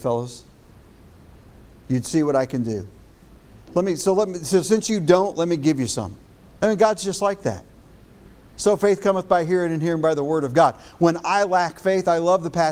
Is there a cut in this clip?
yes; 1 cut; at 6.3 s

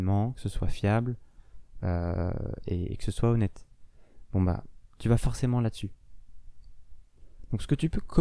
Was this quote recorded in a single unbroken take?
yes; 0 cuts

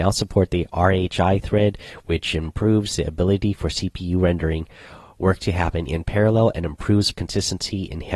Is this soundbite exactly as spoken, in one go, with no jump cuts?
no; 1 cut; at 7.1 s

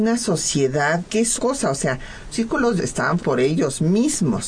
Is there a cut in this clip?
yes; 5 cuts; at 1.0 s, 1.4 s, 2.3 s, 2.8 s, 3.2 s

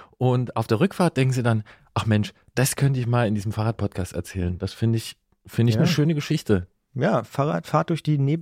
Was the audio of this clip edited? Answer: no; 0 cuts

